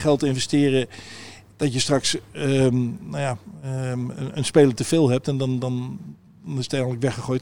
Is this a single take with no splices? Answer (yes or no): yes